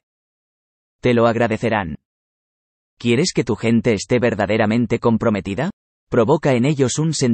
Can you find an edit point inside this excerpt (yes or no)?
no